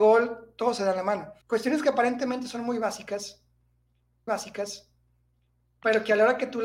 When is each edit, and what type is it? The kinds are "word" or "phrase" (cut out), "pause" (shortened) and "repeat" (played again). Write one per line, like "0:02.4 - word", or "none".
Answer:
0:01.4 - pause
0:04.3 - repeat